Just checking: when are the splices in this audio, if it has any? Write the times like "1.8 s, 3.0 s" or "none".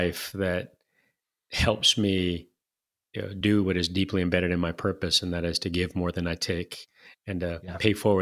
none